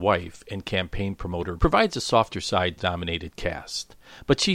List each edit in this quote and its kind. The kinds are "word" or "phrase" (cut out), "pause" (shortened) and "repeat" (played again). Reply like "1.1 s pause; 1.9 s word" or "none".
1.6 s word; 2.8 s phrase